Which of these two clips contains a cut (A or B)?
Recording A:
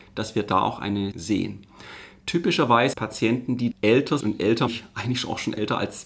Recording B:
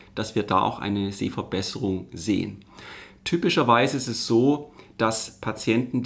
A